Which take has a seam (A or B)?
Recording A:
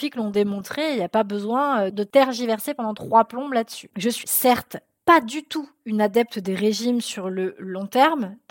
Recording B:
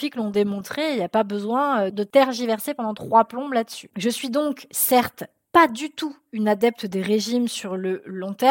A